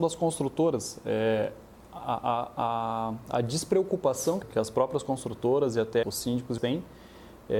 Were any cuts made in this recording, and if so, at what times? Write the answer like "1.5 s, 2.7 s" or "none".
1.8 s, 4.4 s, 6.0 s, 6.6 s

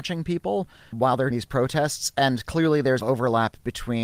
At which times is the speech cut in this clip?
0.9 s, 1.3 s, 3.0 s

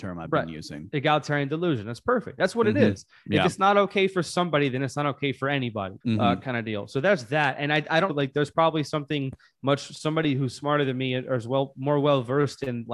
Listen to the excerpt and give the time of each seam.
6.0 s, 8.1 s

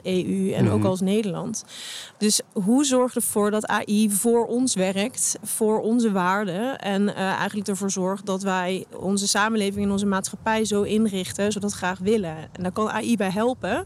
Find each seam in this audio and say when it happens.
11.5 s

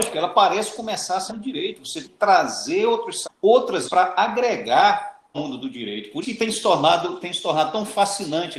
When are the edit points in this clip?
1.3 s, 2.0 s, 3.2 s, 3.8 s, 5.3 s, 6.2 s

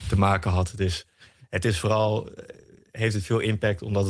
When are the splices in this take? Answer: none

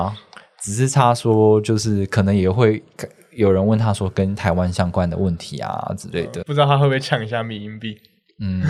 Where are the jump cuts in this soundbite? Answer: 6.4 s

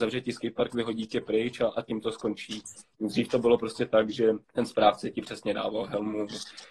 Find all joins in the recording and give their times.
4.4 s

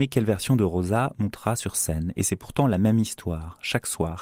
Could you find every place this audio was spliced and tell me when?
none

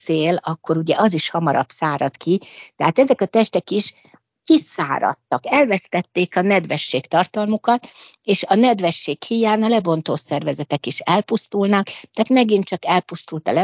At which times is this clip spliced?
none

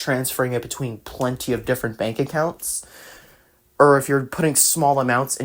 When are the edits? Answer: none

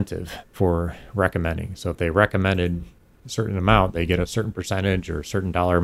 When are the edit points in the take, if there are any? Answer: none

